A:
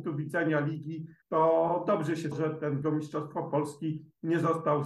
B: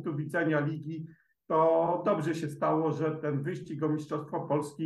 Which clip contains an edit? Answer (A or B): A